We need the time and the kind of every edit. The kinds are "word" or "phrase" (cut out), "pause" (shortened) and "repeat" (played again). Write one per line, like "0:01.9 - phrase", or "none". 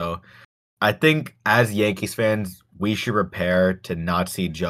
none